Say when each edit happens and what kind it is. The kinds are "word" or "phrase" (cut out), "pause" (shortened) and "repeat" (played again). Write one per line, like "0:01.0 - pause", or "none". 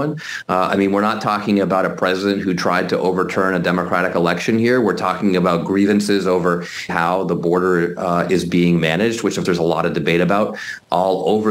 0:06.9 - phrase
0:09.4 - word